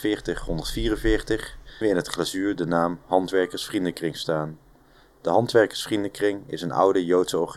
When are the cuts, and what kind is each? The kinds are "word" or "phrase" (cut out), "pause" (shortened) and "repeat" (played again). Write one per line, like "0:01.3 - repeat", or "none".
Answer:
0:01.8 - word